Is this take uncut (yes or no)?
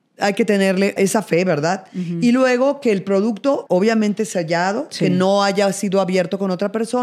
no